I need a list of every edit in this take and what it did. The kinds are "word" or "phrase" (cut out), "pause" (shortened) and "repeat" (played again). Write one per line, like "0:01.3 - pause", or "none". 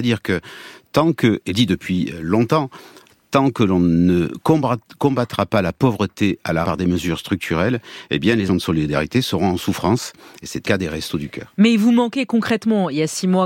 0:01.5 - word
0:06.6 - word
0:08.5 - word
0:10.6 - word